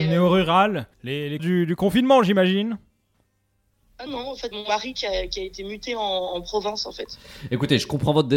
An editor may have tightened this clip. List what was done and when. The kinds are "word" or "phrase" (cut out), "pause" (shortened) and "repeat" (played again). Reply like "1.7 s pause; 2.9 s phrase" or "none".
0.9 s pause; 1.4 s word; 4.1 s word; 4.5 s word

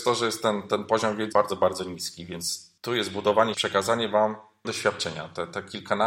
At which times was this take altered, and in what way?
1.3 s word; 2.8 s pause; 3.5 s word; 4.6 s word

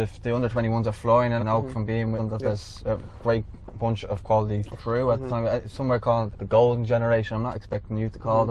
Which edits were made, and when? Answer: 1.4 s phrase; 2.2 s word; 4.8 s phrase; 6.3 s word

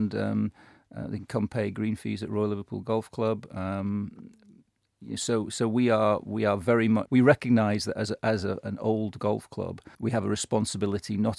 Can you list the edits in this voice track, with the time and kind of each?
7.0 s word; 9.9 s pause

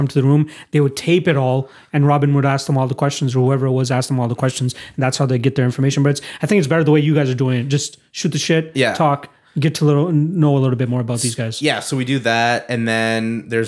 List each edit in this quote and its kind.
none

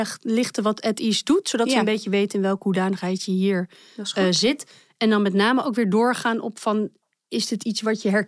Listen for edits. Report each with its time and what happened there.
none

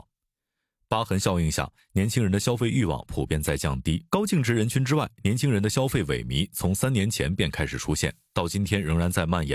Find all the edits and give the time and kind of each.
4.1 s pause

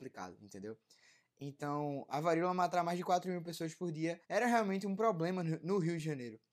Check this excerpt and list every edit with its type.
4.2 s pause

